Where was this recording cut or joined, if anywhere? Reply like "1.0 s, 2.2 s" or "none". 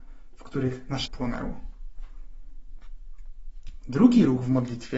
1.1 s